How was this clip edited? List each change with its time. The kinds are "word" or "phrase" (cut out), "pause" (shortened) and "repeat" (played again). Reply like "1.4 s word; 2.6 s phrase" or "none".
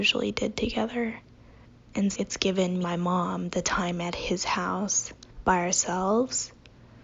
2.1 s word; 2.8 s word; 5.3 s pause

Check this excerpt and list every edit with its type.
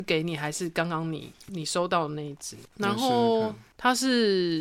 1.5 s word; 2.6 s pause

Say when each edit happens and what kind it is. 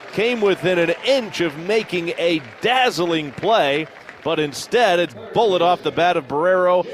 5.1 s word

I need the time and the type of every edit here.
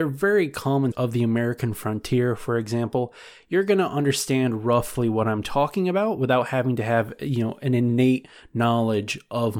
0.9 s word

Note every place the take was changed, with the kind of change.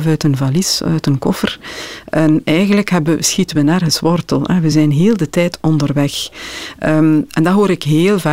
none

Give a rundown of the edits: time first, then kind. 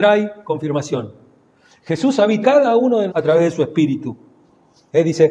2.4 s word; 3.1 s word

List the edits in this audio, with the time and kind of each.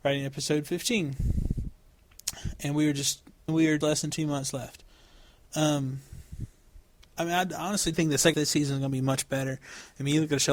3.5 s word; 3.8 s word; 7.9 s word; 8.3 s word

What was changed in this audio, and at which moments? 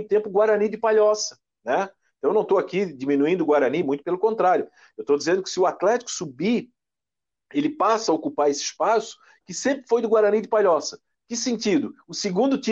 none

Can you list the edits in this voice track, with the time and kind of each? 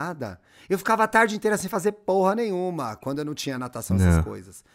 none

